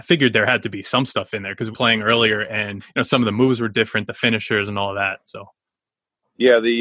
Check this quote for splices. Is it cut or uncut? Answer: cut